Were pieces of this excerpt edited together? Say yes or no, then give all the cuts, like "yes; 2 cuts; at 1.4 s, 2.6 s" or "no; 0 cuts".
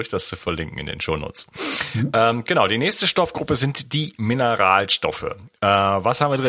no; 0 cuts